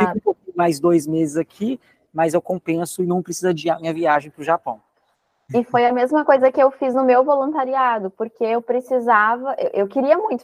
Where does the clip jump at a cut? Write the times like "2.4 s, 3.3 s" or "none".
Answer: none